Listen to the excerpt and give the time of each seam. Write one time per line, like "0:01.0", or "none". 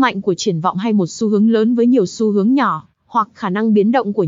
none